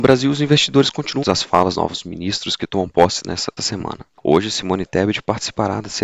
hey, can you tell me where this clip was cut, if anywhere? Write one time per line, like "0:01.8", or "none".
0:01.2
0:01.7
0:03.6